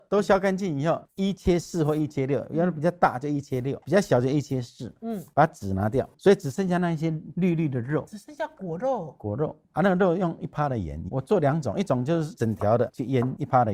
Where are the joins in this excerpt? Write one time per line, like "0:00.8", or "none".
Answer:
0:03.8
0:06.1
0:09.6